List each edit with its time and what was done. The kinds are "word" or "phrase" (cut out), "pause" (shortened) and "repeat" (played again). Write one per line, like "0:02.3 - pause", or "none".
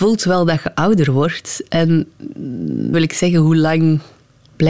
0:02.9 - word